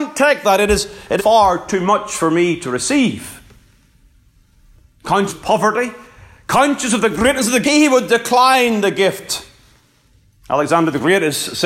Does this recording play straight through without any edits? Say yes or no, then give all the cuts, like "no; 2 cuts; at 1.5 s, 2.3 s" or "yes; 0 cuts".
no; 3 cuts; at 1.2 s, 5.3 s, 7.6 s